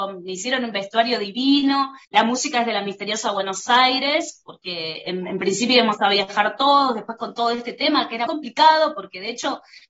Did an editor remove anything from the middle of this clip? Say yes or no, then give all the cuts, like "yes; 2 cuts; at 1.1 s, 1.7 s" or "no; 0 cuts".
yes; 2 cuts; at 2.0 s, 8.3 s